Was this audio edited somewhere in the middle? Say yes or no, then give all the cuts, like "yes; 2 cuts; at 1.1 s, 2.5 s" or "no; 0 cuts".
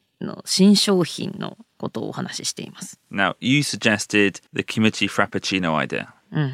yes; 1 cut; at 4.5 s